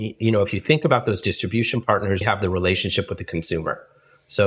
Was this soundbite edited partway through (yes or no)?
yes